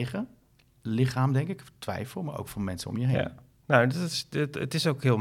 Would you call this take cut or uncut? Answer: uncut